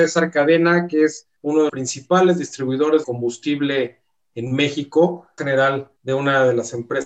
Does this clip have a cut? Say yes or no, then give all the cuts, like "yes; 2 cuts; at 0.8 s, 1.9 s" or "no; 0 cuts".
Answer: yes; 5 cuts; at 1.4 s, 1.7 s, 3.0 s, 5.4 s, 6.0 s